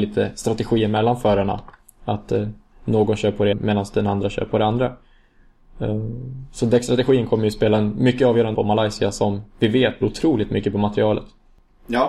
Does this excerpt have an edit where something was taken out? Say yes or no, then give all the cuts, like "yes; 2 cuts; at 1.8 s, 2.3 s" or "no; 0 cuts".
yes; 3 cuts; at 3.5 s, 8.5 s, 10.0 s